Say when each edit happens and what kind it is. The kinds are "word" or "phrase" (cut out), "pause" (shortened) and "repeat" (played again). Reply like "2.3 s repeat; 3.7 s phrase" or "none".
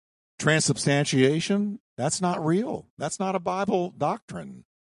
none